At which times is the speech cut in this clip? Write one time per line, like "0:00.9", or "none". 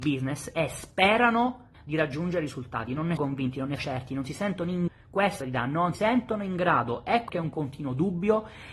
0:01.7
0:03.2
0:03.8
0:04.9
0:05.4
0:05.9
0:07.3